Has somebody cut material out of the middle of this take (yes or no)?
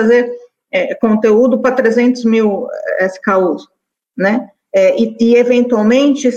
no